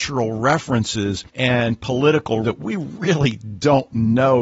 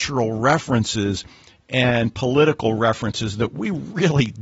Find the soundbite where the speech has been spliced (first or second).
first